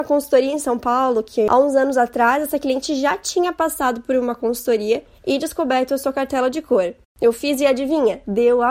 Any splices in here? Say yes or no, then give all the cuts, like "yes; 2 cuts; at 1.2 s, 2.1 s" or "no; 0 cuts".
no; 0 cuts